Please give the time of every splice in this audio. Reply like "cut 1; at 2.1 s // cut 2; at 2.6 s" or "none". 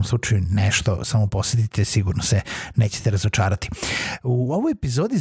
none